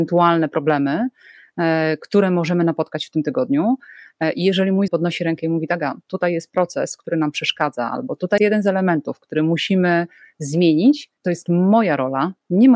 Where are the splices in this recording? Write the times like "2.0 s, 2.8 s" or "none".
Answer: 4.9 s, 8.4 s, 11.2 s